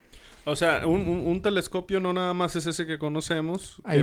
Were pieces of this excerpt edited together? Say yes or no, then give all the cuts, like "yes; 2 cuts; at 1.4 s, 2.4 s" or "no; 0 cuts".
no; 0 cuts